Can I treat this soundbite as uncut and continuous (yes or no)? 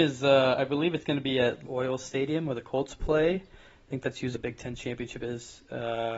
no